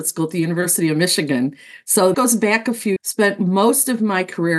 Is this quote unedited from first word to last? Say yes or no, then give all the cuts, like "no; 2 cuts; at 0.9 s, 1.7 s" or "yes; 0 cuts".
no; 2 cuts; at 2.1 s, 3.0 s